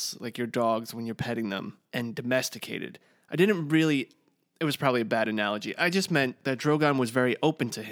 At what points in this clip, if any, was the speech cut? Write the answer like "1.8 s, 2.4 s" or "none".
none